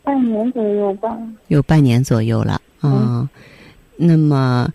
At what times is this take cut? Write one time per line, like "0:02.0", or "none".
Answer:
0:01.4
0:02.7